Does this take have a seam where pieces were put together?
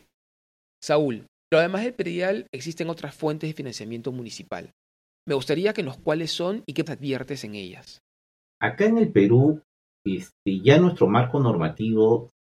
yes; 3 cuts; at 1.5 s, 6.0 s, 6.9 s

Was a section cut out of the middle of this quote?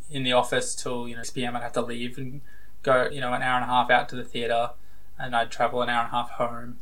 yes; 3 cuts; at 1.2 s, 3.1 s, 5.3 s

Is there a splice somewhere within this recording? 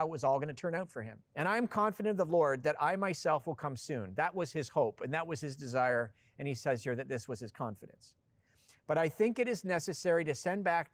yes; 1 cut; at 1.3 s

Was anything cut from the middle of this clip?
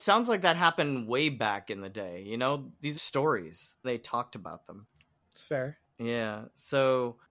yes; 2 cuts; at 2.9 s, 3.8 s

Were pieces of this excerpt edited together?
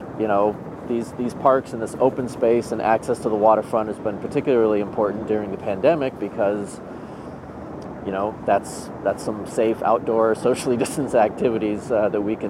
no; 0 cuts

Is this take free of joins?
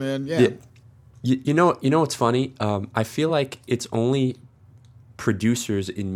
yes; 0 cuts

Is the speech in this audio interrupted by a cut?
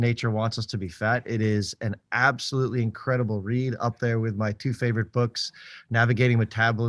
no; 0 cuts

